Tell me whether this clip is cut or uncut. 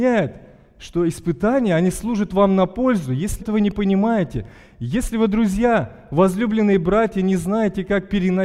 cut